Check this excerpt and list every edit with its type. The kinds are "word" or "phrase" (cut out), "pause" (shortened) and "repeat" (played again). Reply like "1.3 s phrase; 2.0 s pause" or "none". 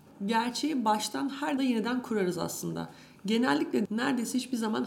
1.6 s word; 3.8 s word